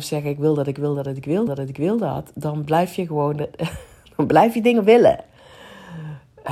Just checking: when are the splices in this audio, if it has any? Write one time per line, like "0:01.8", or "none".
0:01.5